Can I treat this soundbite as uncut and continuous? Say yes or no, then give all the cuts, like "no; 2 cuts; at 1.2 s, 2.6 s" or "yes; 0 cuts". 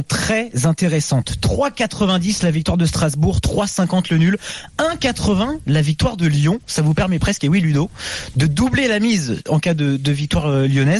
yes; 0 cuts